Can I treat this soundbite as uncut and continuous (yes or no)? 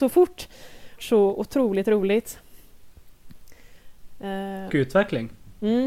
no